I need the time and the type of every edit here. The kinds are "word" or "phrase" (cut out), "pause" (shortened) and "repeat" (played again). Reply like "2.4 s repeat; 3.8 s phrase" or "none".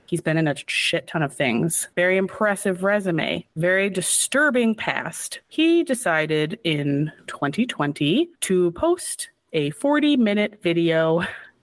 1.9 s pause; 3.5 s pause; 5.4 s pause; 8.3 s pause